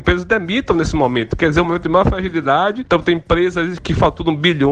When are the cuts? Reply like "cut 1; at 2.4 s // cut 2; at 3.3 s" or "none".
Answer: none